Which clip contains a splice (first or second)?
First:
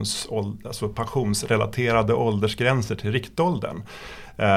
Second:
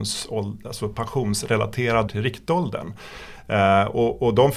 second